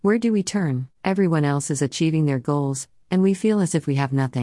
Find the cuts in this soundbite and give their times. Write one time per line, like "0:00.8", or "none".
0:00.9